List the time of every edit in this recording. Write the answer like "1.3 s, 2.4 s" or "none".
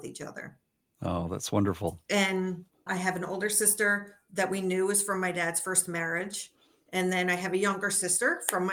none